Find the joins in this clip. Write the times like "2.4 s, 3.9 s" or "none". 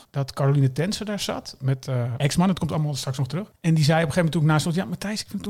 2.2 s